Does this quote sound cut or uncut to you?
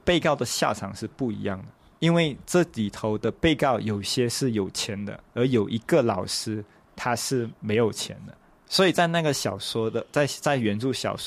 cut